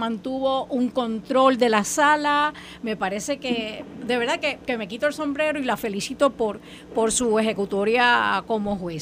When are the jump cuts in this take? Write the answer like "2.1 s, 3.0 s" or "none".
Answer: none